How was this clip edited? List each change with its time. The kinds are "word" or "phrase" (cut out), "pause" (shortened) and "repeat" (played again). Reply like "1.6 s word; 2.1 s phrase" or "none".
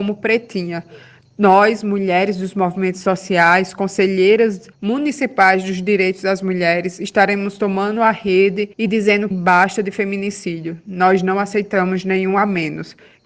4.7 s pause; 8.7 s pause; 9.3 s word